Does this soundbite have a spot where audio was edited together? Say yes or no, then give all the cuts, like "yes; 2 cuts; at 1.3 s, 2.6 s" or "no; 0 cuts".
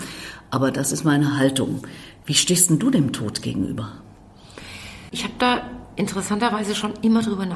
no; 0 cuts